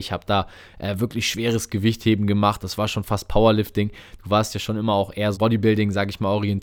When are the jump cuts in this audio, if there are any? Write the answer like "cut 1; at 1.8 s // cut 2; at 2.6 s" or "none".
cut 1; at 5.3 s

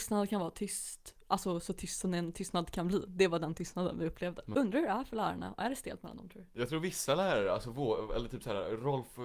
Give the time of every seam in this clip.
none

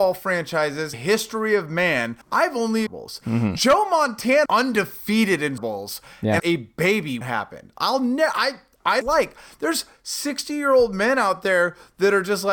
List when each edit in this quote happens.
cut 1; at 0.9 s // cut 2; at 2.2 s // cut 3; at 2.9 s // cut 4; at 4.5 s // cut 5; at 5.6 s // cut 6; at 6.4 s // cut 7; at 7.2 s // cut 8; at 9.0 s

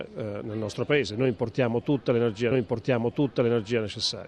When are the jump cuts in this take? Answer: cut 1; at 2.5 s

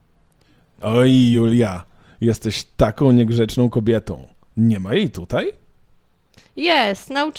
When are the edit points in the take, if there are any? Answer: none

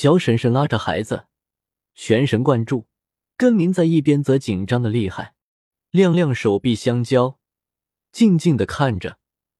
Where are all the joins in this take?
none

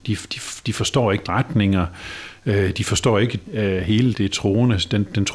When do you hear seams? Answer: cut 1; at 1.3 s // cut 2; at 3.5 s // cut 3; at 4.1 s

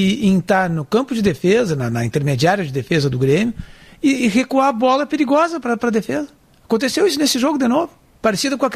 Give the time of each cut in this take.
none

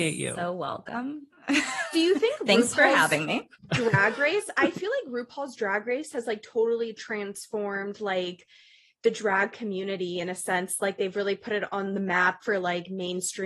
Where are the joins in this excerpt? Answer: none

